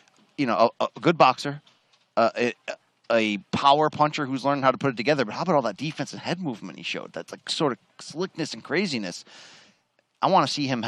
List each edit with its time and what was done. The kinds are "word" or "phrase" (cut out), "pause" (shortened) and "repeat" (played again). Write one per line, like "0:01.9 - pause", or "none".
none